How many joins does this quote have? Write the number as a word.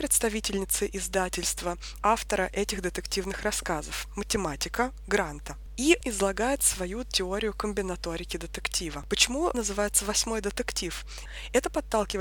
three